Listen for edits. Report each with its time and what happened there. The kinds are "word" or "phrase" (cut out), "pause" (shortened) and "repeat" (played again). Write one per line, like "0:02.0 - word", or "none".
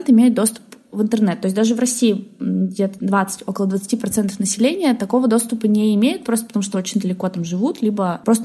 none

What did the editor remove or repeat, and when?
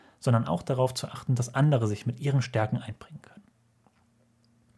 none

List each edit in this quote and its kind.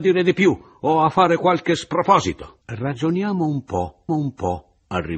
0:02.6 - pause
0:04.1 - repeat

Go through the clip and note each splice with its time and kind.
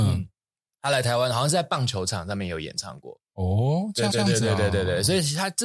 0:04.1 - repeat

